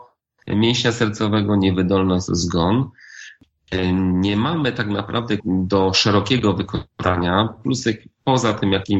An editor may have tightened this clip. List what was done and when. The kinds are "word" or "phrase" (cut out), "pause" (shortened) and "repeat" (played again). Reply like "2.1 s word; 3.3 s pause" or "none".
2.3 s phrase; 5.4 s phrase